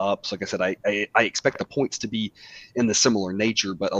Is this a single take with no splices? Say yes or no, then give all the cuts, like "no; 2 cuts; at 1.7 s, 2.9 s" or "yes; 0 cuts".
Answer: yes; 0 cuts